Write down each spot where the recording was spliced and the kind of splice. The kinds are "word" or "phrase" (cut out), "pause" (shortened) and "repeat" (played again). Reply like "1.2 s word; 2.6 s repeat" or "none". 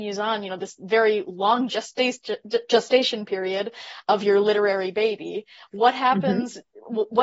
none